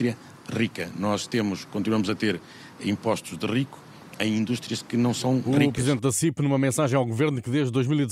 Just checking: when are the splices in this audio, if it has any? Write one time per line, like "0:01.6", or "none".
none